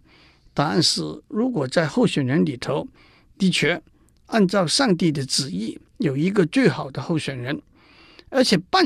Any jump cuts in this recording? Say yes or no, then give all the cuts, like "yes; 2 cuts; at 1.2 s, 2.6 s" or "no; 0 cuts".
yes; 1 cut; at 5.9 s